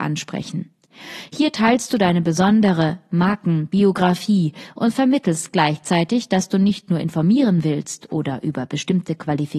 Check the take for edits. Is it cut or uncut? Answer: uncut